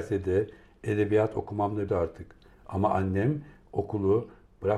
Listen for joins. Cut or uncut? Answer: cut